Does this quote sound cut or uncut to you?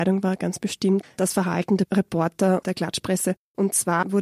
cut